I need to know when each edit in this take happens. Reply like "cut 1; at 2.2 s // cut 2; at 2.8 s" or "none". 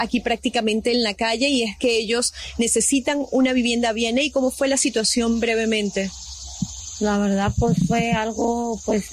none